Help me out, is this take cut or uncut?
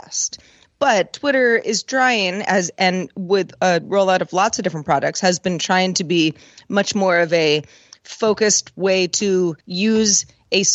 cut